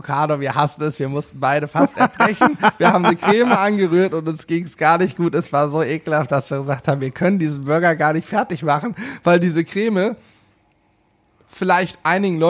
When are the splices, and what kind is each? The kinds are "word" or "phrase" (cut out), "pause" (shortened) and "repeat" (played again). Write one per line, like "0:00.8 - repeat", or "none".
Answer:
none